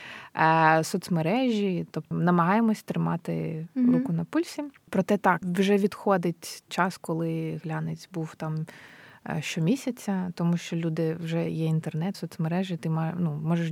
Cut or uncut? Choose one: cut